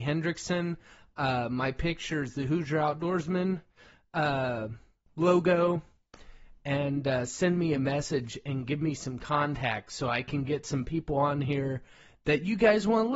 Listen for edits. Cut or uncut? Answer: uncut